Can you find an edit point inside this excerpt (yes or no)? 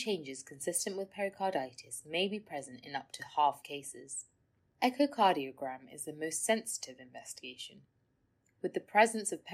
yes